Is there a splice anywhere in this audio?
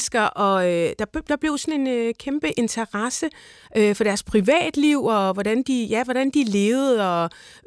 no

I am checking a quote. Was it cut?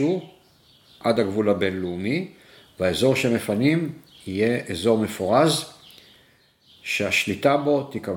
no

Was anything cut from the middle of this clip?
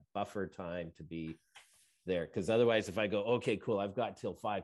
no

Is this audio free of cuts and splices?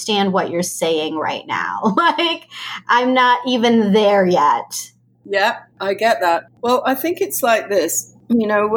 yes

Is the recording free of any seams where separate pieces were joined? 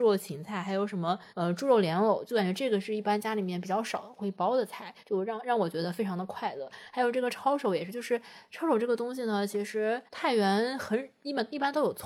no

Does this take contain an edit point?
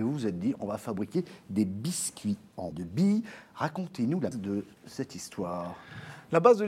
yes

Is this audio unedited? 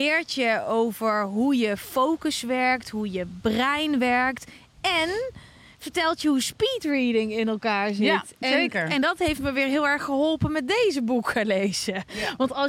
yes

